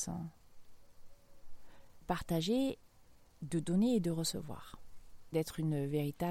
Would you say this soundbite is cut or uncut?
cut